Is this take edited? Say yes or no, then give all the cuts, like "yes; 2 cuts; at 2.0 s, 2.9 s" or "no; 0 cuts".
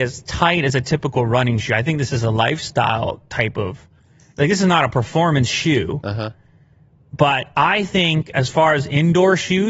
no; 0 cuts